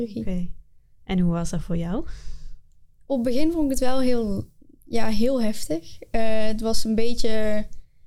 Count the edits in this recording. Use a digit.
0